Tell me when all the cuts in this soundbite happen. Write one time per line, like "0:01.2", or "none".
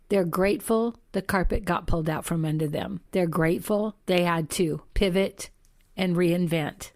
none